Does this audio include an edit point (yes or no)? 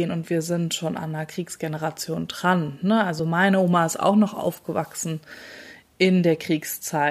no